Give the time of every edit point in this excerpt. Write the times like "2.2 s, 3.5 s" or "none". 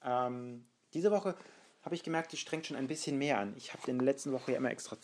none